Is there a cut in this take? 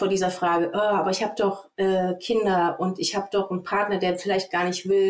no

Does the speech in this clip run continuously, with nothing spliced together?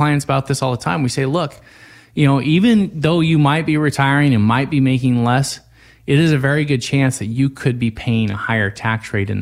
yes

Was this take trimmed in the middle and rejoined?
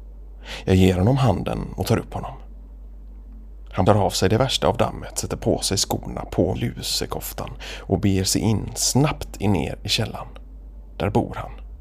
yes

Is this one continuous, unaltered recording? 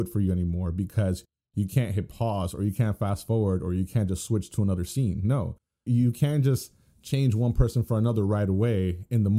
yes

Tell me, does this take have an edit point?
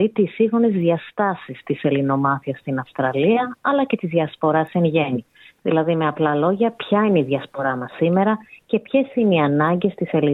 no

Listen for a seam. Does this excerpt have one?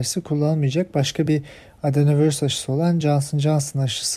no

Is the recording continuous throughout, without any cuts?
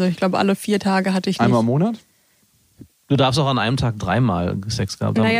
yes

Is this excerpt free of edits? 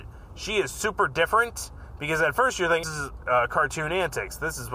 no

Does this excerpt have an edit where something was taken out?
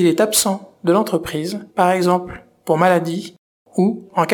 yes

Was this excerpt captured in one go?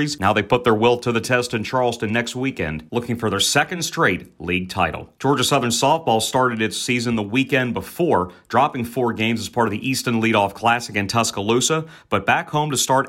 yes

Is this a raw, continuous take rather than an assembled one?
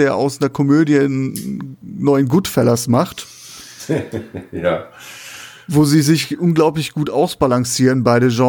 yes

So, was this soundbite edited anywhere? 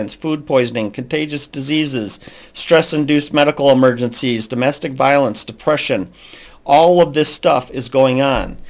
no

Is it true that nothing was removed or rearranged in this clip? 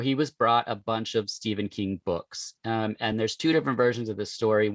yes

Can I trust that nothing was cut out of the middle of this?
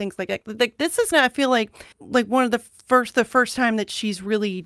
no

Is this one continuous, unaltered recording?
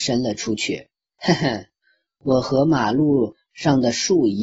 yes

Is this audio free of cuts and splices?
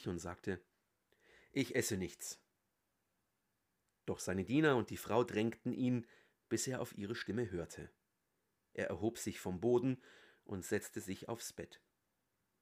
yes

